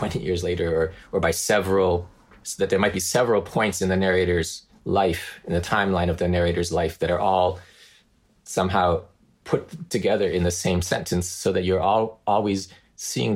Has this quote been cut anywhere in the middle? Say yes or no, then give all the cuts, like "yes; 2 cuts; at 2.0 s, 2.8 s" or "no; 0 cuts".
no; 0 cuts